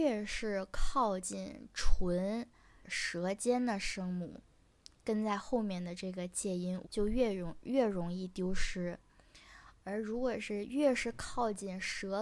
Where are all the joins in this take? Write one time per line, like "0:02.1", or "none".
0:02.8
0:06.8